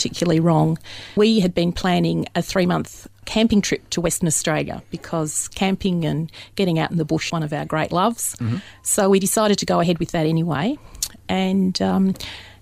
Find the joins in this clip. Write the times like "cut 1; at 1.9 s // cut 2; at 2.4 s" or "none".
cut 1; at 1.2 s // cut 2; at 7.3 s